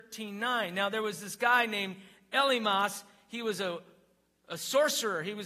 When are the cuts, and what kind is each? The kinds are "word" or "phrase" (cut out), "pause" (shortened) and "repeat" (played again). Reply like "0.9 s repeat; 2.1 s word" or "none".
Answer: none